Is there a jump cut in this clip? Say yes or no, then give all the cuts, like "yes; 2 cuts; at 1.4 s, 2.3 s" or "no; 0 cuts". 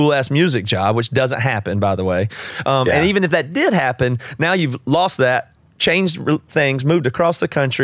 no; 0 cuts